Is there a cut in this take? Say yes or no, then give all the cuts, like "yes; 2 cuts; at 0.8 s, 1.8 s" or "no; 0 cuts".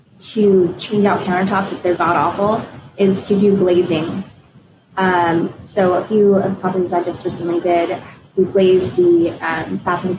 yes; 1 cut; at 2.0 s